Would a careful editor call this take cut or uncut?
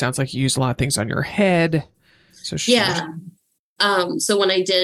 uncut